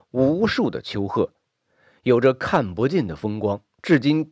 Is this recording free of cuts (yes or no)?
yes